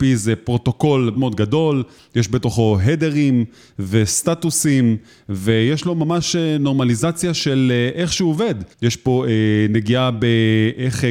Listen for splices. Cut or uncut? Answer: cut